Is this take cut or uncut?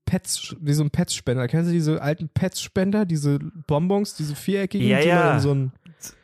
uncut